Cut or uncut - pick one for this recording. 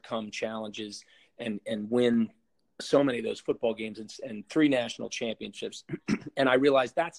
uncut